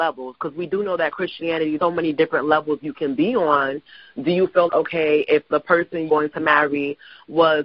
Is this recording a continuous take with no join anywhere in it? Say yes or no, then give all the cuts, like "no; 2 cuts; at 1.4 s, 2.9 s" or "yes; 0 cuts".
no; 3 cuts; at 1.8 s, 4.7 s, 6.1 s